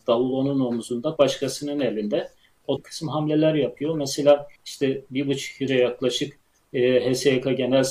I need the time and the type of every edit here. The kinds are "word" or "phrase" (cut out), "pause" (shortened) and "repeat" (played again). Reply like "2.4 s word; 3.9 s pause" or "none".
1.2 s word; 2.8 s phrase; 4.6 s pause; 5.7 s word